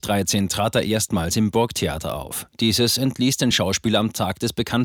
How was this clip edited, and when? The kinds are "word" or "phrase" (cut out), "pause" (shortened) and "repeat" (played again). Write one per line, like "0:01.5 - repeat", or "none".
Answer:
none